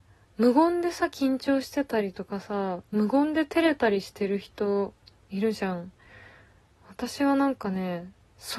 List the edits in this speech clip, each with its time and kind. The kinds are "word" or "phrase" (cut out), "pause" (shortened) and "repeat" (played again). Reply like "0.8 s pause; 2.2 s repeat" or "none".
none